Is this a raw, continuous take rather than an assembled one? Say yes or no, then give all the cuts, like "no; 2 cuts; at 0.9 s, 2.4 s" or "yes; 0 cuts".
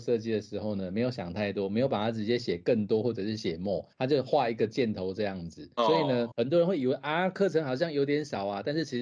no; 3 cuts; at 3.9 s, 5.7 s, 6.3 s